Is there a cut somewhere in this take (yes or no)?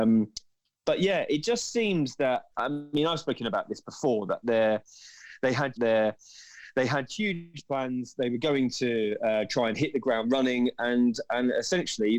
yes